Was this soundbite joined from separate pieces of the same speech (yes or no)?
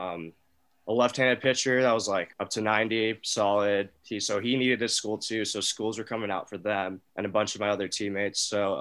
yes